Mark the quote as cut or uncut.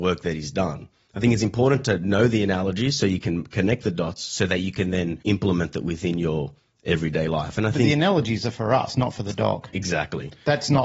cut